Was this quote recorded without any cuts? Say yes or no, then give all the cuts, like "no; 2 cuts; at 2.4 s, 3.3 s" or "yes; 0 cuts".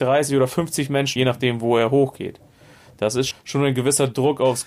no; 2 cuts; at 1.2 s, 3.3 s